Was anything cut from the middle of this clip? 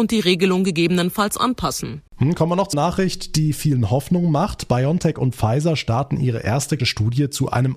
yes; 3 cuts; at 2.1 s, 2.7 s, 6.8 s

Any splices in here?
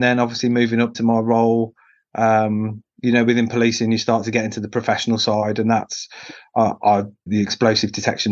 yes; 2 cuts; at 0.9 s, 7.3 s

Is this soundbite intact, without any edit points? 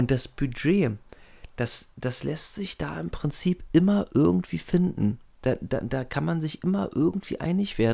yes; 0 cuts

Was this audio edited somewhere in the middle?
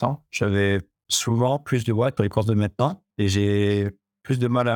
yes; 2 cuts; at 2.2 s, 3.1 s

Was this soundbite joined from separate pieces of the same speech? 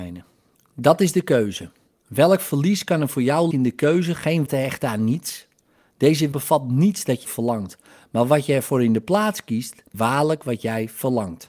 yes; 5 cuts; at 3.5 s, 4.5 s, 6.3 s, 7.2 s, 9.9 s

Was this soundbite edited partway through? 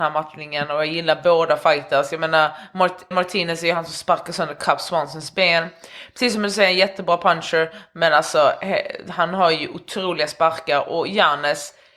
yes; 1 cut; at 3.1 s

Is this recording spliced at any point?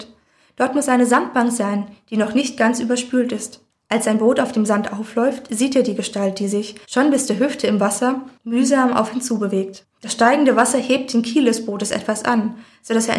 yes; 1 cut; at 6.8 s

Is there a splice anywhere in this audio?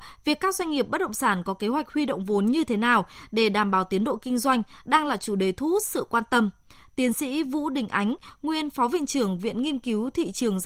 no; 0 cuts

